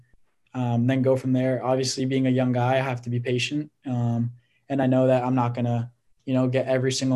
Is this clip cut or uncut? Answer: uncut